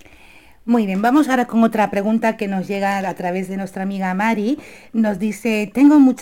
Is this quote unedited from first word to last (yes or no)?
yes